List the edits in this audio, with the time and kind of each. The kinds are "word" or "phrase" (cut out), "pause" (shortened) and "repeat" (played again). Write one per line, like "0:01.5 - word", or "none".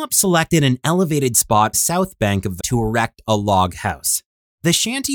0:01.7 - phrase
0:02.6 - word